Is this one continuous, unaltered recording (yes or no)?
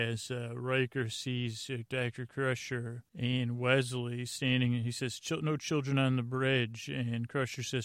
no